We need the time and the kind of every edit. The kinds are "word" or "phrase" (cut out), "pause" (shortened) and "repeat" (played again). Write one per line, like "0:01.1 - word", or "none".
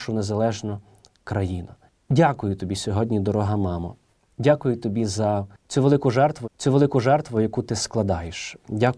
0:06.4 - repeat